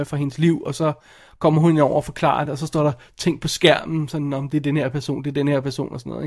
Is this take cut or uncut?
uncut